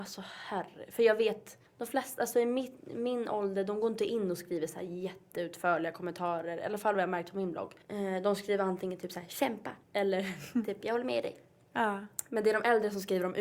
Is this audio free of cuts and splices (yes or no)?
no